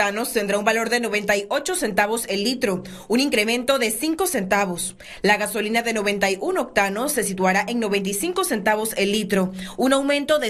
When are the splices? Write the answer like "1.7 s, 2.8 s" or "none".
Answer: none